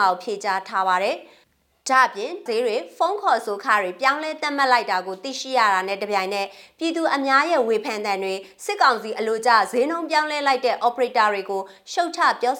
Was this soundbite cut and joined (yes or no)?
yes